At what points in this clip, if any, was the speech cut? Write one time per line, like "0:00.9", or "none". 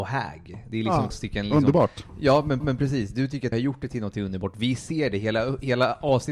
0:01.1
0:02.6
0:03.5